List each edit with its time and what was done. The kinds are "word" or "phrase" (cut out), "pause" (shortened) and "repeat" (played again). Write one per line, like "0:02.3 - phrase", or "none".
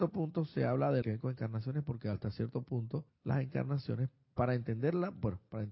0:01.0 - phrase
0:03.1 - pause